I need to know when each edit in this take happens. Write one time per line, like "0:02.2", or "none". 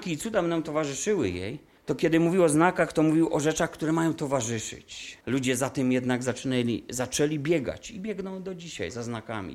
0:01.8
0:05.2